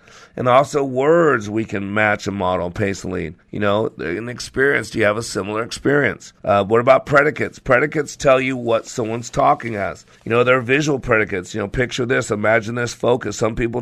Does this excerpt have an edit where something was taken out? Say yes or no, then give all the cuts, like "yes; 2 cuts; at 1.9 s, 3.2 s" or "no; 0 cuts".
yes; 3 cuts; at 3.4 s, 6.4 s, 10.1 s